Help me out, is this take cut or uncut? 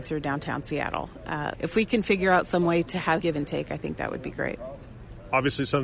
cut